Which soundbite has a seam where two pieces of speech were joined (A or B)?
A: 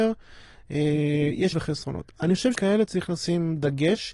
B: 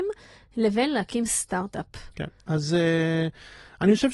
A